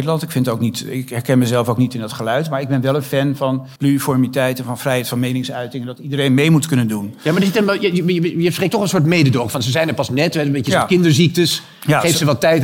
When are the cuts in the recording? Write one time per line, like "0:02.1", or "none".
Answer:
0:03.8